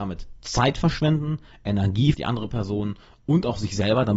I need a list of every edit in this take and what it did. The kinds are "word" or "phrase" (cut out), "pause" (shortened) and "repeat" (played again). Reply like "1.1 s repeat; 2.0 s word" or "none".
2.1 s word